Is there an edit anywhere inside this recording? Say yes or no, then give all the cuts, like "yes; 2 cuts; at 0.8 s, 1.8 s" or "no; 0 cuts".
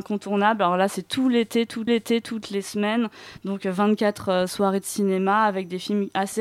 yes; 1 cut; at 1.9 s